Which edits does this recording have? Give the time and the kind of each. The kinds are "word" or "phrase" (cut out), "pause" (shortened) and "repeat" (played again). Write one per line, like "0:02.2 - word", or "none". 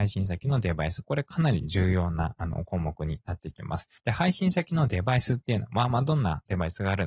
0:04.0 - pause